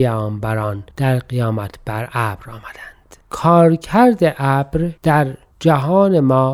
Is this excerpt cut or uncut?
cut